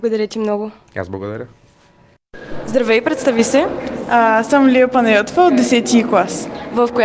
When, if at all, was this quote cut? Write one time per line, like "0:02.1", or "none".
none